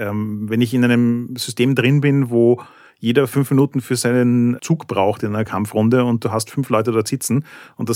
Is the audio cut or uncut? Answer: uncut